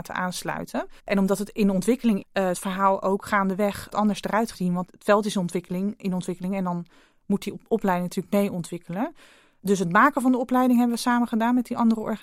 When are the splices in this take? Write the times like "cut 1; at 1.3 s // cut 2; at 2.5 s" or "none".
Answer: cut 1; at 1.0 s // cut 2; at 2.2 s // cut 3; at 2.5 s // cut 4; at 3.9 s // cut 5; at 4.5 s // cut 6; at 4.8 s